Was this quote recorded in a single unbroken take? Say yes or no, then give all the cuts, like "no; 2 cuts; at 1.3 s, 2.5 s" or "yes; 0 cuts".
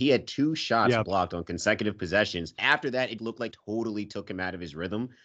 no; 3 cuts; at 2.6 s, 3.2 s, 3.5 s